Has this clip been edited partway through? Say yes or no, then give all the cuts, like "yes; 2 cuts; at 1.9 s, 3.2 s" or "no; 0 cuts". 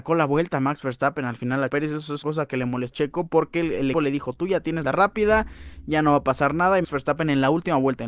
yes; 6 cuts; at 1.7 s, 2.2 s, 2.9 s, 3.9 s, 4.8 s, 6.8 s